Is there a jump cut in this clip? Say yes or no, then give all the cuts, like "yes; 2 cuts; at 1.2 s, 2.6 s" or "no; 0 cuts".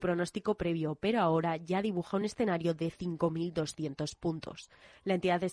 no; 0 cuts